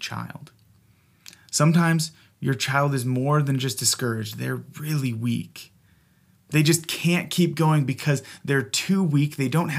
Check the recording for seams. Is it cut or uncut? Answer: uncut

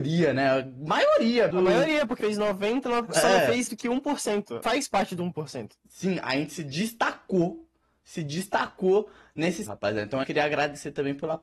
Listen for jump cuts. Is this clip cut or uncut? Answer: cut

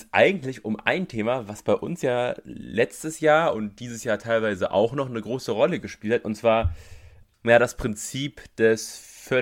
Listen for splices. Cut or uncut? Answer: uncut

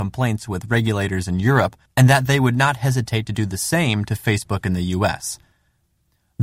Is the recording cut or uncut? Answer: uncut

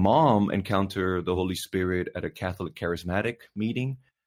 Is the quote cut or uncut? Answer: uncut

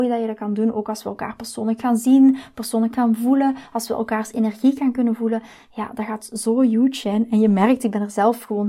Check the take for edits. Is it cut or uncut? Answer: uncut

